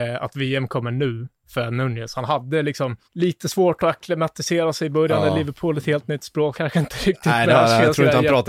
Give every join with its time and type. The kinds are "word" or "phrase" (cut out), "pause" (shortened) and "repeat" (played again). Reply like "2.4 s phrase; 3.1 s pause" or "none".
3.0 s pause; 6.5 s phrase